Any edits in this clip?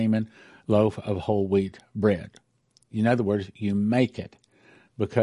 no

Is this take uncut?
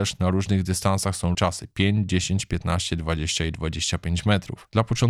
no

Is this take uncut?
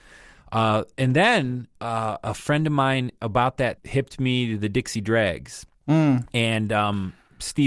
no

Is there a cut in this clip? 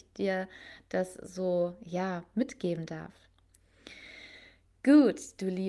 no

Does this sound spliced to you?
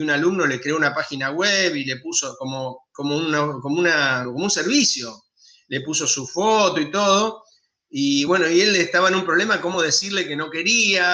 no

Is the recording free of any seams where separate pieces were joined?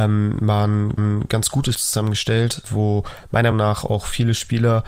no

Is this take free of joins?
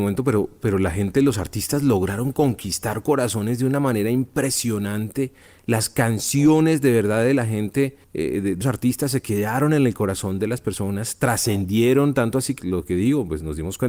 no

